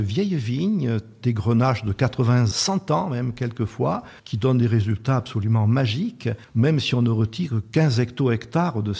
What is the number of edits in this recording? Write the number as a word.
three